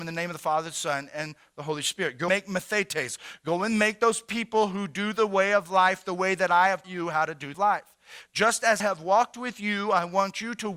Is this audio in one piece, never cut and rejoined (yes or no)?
no